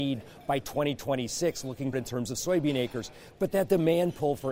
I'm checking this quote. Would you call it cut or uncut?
cut